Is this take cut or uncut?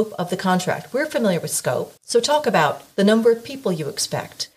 cut